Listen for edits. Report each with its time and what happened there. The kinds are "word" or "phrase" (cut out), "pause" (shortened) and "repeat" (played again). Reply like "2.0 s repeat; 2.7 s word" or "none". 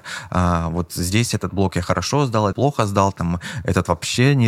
2.5 s word